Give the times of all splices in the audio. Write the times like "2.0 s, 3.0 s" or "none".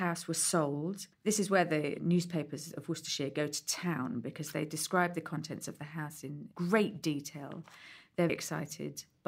1.1 s, 8.3 s